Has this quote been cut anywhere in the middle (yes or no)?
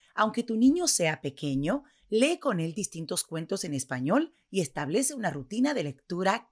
no